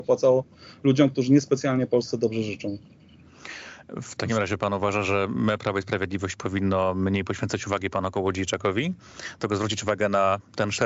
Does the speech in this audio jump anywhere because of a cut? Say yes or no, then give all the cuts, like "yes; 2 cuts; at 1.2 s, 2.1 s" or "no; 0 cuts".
no; 0 cuts